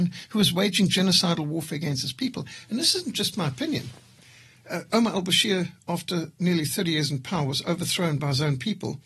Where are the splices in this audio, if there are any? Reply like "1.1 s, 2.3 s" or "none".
none